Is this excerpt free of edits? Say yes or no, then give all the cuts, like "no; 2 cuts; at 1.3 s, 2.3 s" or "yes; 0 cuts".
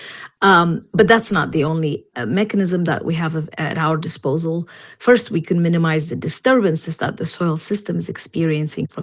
yes; 0 cuts